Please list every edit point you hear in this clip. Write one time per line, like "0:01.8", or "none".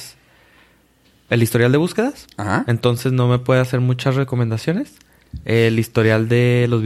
0:01.3